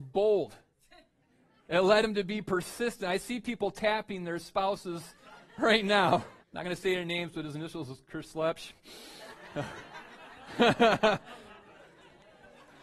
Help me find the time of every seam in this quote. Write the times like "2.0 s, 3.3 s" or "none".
6.4 s